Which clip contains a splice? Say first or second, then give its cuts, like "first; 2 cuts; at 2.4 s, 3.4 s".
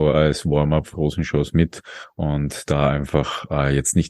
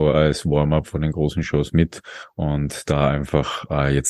first; 1 cut; at 0.9 s